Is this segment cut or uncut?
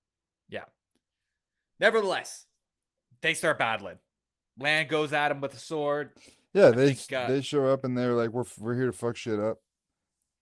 cut